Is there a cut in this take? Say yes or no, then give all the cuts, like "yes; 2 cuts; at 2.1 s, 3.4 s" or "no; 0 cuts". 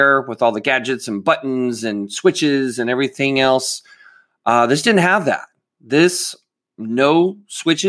no; 0 cuts